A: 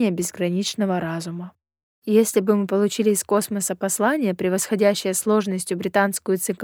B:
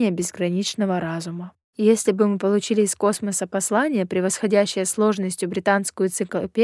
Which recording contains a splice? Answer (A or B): B